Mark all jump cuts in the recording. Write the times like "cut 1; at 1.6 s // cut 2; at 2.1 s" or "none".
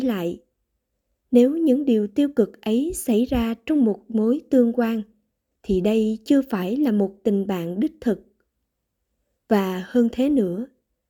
none